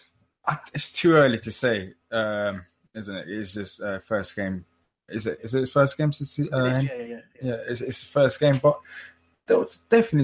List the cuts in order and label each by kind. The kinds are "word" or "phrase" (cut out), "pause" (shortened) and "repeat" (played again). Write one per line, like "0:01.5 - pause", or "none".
none